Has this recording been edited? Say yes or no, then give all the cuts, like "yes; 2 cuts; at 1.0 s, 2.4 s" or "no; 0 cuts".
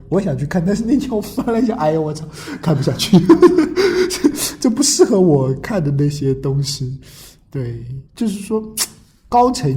yes; 1 cut; at 8.1 s